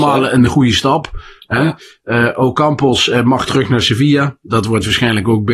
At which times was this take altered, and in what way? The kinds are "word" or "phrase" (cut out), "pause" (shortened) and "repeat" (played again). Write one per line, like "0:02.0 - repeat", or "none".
none

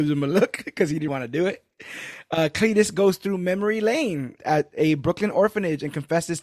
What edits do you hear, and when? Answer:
0:01.1 - word
0:04.4 - word

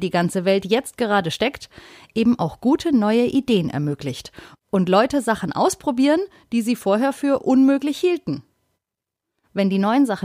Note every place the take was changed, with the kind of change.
none

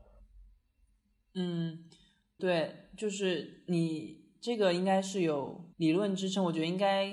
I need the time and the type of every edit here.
0:02.4 - word
0:05.7 - pause

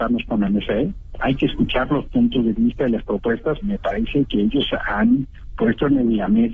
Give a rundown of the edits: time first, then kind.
0:03.6 - word

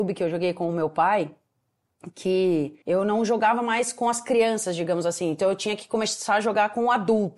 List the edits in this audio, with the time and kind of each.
0:02.8 - pause

